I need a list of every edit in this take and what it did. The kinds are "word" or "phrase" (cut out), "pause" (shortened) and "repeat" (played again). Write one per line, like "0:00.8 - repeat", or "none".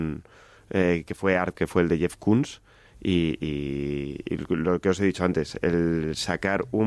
0:01.5 - word